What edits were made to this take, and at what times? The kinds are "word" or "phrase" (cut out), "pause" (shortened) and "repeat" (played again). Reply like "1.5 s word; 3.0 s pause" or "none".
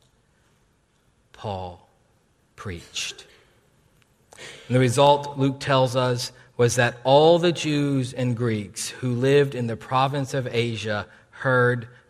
none